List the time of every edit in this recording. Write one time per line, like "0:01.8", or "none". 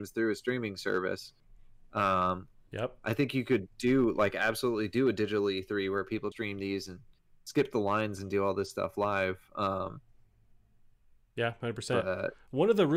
0:06.3